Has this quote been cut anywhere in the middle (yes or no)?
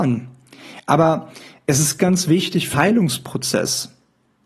yes